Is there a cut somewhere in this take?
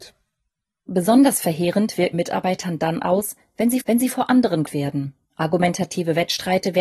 yes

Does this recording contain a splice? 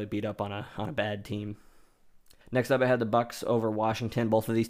yes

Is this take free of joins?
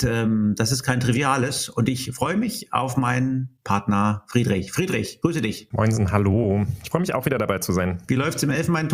yes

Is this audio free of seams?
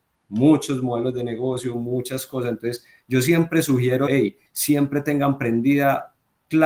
no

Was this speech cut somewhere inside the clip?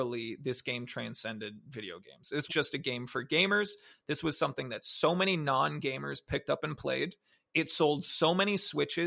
yes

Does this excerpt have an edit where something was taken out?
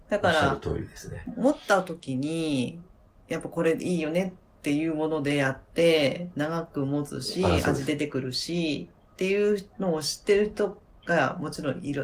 no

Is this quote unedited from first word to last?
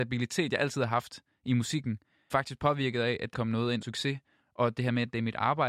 no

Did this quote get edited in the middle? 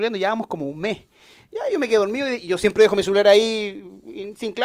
no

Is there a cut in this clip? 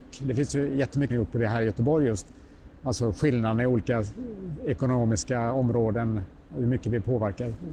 yes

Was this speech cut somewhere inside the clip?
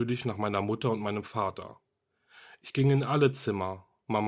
no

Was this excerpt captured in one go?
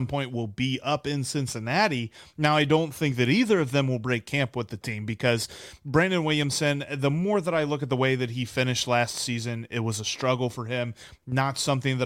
yes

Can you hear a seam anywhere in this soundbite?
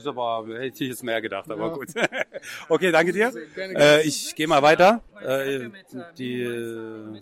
yes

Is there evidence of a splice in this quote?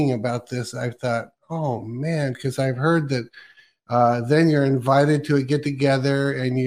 no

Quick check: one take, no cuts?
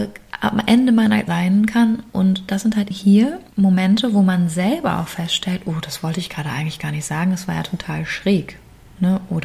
no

